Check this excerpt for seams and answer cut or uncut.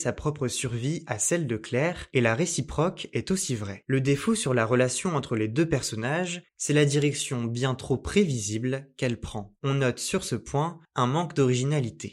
cut